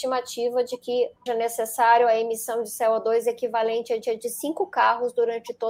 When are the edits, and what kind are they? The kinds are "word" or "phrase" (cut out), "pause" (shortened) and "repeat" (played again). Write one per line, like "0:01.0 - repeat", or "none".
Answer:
0:01.3 - word
0:04.0 - repeat